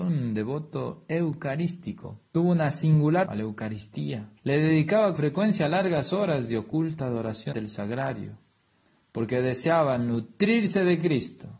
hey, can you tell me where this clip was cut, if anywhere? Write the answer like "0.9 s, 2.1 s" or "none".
2.3 s, 3.2 s, 4.4 s, 5.1 s, 7.5 s

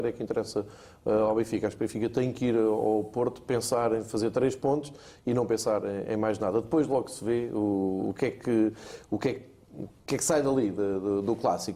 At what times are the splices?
none

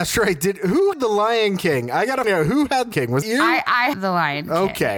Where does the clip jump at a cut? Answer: 0.9 s, 2.2 s, 2.9 s, 3.2 s, 3.9 s

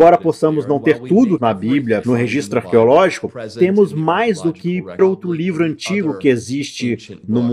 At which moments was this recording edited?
1.4 s, 2.0 s, 5.0 s

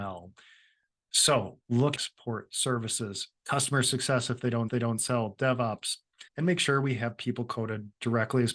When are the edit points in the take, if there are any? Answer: 2.0 s, 3.4 s, 4.7 s, 6.3 s

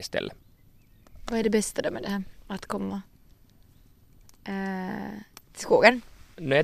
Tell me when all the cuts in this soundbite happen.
none

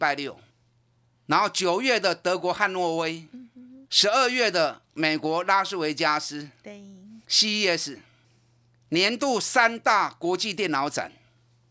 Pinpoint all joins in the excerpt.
3.8 s, 7.2 s

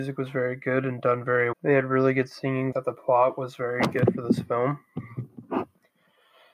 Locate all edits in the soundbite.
1.5 s, 2.7 s

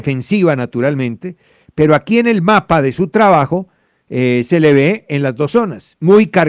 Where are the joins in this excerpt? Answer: none

